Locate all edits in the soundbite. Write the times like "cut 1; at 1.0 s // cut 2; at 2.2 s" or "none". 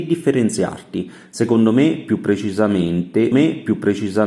cut 1; at 3.3 s

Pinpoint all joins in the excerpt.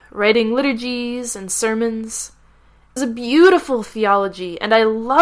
cut 1; at 3.0 s

